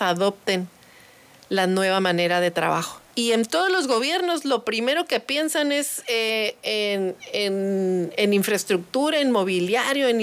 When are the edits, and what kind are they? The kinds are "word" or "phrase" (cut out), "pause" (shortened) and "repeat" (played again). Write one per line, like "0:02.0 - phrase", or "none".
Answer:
0:03.1 - pause